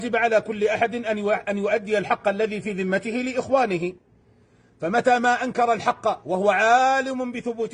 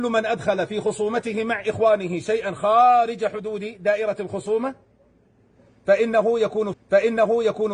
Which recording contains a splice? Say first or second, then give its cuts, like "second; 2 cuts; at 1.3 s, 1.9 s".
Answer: second; 1 cut; at 6.7 s